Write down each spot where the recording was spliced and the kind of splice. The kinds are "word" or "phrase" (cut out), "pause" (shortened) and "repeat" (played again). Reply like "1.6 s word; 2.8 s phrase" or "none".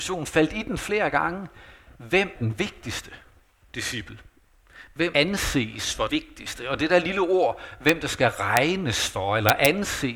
2.4 s word; 5.1 s word; 6.1 s word